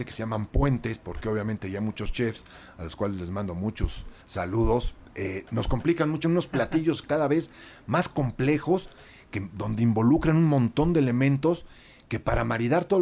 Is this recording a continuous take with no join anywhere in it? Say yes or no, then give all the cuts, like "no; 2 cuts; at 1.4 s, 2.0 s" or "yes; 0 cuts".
no; 2 cuts; at 4.2 s, 6.2 s